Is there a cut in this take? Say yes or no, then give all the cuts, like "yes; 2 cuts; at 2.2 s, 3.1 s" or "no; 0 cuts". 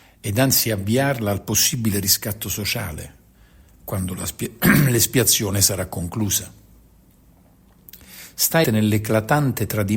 yes; 1 cut; at 8.6 s